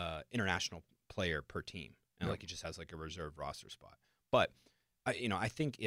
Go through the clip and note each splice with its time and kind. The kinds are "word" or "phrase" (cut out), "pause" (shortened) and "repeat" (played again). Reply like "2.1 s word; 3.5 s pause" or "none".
none